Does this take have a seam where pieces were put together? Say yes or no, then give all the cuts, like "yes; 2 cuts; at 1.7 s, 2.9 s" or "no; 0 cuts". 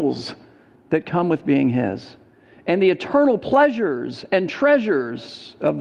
no; 0 cuts